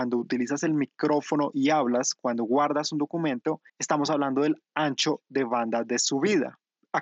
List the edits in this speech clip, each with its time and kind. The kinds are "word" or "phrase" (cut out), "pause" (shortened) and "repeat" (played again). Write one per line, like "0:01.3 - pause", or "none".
0:03.7 - pause

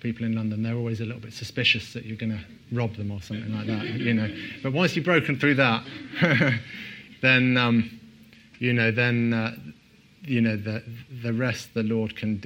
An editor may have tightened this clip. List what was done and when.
none

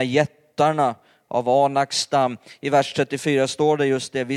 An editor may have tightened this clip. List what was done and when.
none

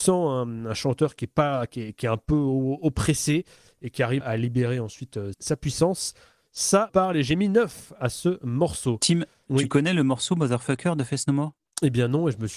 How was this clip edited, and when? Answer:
0:04.2 - word
0:05.3 - word
0:06.9 - word
0:09.5 - word

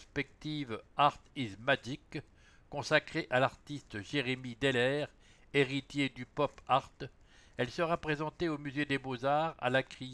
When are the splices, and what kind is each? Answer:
none

